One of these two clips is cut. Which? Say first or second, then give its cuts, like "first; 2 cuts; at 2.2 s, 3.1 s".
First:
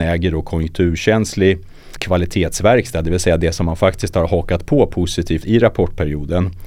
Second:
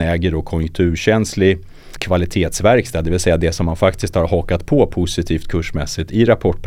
first; 1 cut; at 5.4 s